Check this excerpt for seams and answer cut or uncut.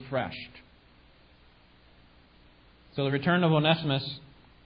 uncut